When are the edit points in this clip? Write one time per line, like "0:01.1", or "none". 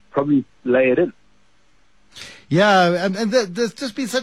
0:03.1